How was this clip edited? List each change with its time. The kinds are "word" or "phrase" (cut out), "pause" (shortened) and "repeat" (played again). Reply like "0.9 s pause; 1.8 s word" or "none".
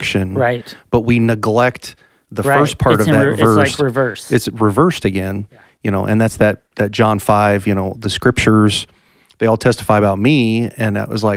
none